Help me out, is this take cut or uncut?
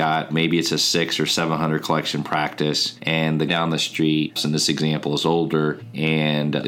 cut